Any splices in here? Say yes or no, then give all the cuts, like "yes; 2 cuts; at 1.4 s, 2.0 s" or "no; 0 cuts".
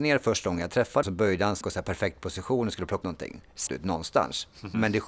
yes; 4 cuts; at 1.0 s, 1.6 s, 3.0 s, 3.7 s